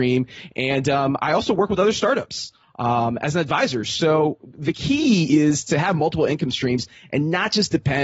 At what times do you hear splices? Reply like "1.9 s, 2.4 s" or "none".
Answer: none

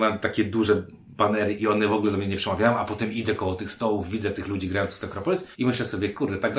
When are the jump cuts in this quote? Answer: 5.5 s

